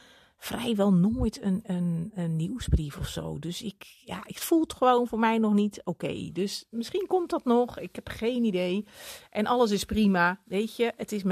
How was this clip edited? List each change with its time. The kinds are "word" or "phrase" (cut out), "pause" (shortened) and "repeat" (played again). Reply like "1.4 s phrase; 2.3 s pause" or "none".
none